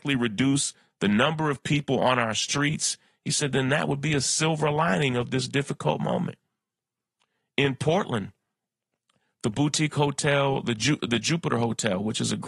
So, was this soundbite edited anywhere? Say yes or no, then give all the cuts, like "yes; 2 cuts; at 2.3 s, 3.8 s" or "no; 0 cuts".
no; 0 cuts